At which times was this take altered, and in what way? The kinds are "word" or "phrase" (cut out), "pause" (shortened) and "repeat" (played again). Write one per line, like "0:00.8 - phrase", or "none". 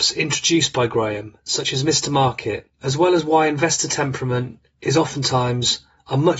0:02.7 - pause